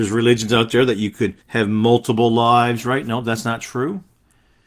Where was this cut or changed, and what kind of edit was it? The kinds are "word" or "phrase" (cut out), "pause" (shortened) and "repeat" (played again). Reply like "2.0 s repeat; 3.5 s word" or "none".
1.4 s pause

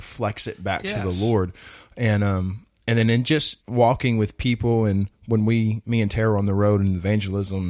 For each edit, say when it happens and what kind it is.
3.6 s pause

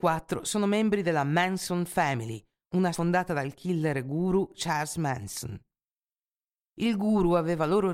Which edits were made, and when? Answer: 2.9 s word

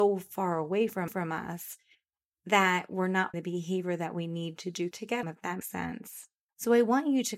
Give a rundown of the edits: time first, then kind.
1.1 s repeat; 3.3 s word; 4.9 s word; 5.2 s phrase; 5.6 s word; 6.4 s pause

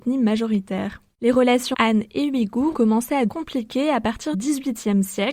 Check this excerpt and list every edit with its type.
1.7 s word; 2.7 s word; 3.3 s word; 4.3 s word

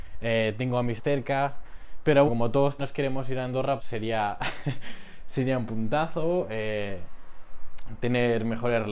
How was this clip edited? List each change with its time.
1.0 s word; 2.3 s word; 2.8 s word; 3.8 s word

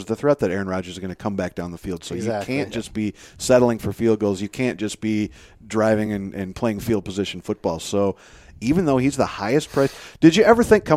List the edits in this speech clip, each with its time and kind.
none

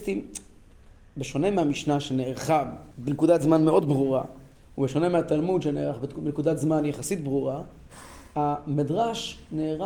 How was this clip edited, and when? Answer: 2.9 s pause; 4.5 s pause

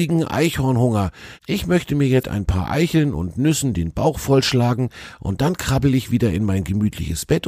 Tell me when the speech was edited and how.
2.2 s word

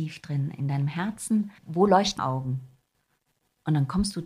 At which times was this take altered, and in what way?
1.6 s pause; 2.2 s phrase

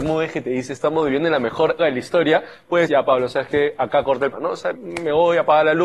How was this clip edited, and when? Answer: 1.8 s word; 2.9 s word; 4.3 s word; 4.7 s word

